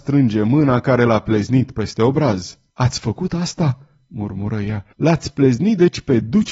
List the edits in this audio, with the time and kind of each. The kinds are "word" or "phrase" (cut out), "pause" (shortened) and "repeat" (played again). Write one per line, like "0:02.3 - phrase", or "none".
0:02.7 - pause
0:04.9 - pause